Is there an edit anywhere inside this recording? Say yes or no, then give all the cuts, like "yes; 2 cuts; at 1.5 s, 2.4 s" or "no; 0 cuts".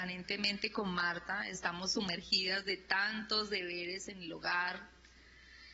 no; 0 cuts